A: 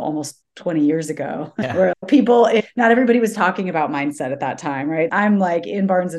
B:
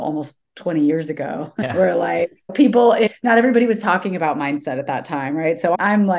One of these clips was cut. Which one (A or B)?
A